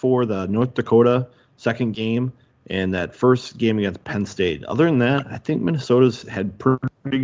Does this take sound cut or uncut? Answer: uncut